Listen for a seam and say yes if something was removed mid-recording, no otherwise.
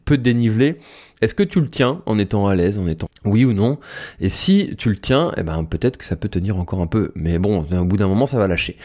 yes